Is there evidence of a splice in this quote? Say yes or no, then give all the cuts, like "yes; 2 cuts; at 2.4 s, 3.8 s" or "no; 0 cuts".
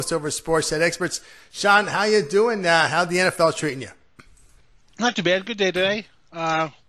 no; 0 cuts